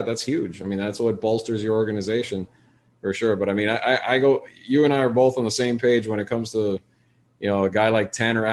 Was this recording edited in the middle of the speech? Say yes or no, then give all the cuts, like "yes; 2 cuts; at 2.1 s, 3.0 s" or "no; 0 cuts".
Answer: no; 0 cuts